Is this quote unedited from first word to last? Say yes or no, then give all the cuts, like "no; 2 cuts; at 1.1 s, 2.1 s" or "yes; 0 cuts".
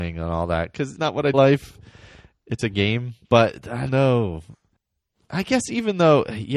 no; 5 cuts; at 1.0 s, 1.3 s, 2.6 s, 3.2 s, 3.9 s